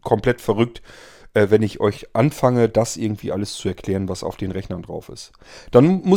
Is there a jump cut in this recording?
no; 0 cuts

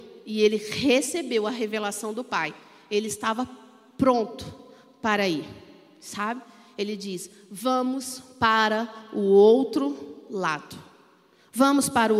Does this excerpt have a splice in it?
no; 0 cuts

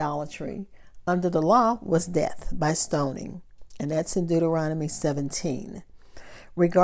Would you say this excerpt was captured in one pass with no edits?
yes; 0 cuts

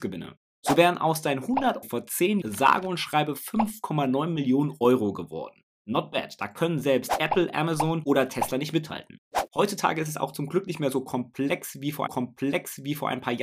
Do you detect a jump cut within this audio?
yes; 3 cuts; at 1.8 s, 2.4 s, 12.1 s

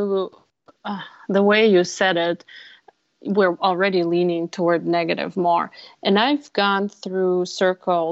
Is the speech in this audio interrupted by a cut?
no; 0 cuts

